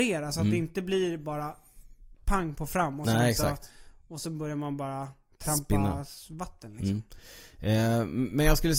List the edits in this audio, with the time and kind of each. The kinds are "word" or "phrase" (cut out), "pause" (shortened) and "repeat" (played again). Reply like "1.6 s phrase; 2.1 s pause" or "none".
none